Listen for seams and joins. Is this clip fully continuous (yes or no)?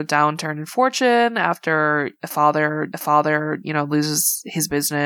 no